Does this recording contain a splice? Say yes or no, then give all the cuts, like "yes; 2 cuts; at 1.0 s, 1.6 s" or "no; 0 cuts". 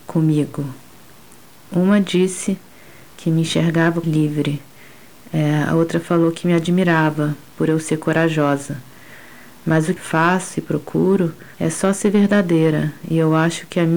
yes; 3 cuts; at 4.0 s, 10.0 s, 11.5 s